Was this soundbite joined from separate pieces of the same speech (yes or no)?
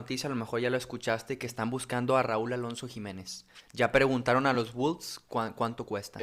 no